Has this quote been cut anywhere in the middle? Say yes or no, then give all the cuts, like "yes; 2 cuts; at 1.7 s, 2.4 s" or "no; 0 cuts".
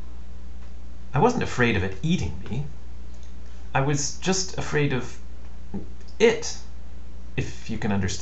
no; 0 cuts